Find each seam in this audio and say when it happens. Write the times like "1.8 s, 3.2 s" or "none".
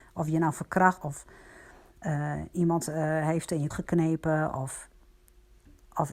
1.0 s, 3.7 s